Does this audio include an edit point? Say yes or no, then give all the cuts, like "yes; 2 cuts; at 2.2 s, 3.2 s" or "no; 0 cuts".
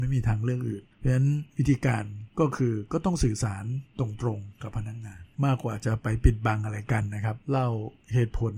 yes; 5 cuts; at 0.9 s, 1.5 s, 2.3 s, 5.3 s, 7.4 s